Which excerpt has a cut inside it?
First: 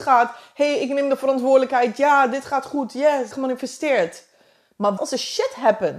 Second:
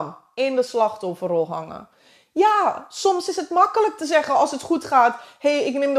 first; 2 cuts; at 3.3 s, 5.0 s

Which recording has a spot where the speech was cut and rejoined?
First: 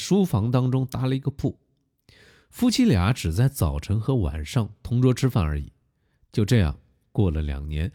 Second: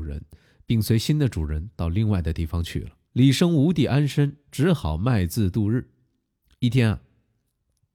second; 1 cut; at 3.0 s

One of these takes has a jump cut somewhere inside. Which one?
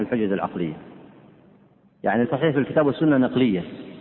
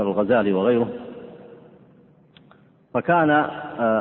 first; 1 cut; at 2.2 s

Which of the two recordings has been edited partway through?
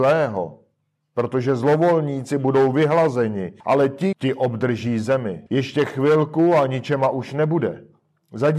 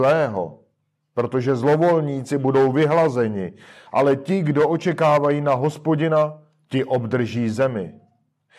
first; 3 cuts; at 3.6 s, 4.1 s, 5.5 s

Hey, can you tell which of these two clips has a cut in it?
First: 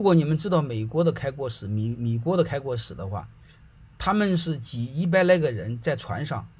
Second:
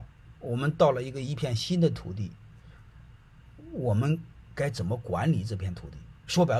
first; 1 cut; at 3.9 s

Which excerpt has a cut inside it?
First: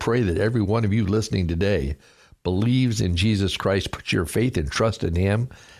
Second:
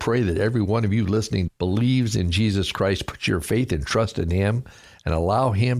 second; 1 cut; at 1.5 s

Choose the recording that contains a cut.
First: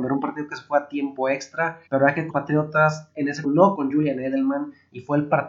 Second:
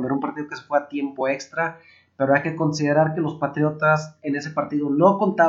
first; 4 cuts; at 1.9 s, 2.3 s, 3.4 s, 3.7 s

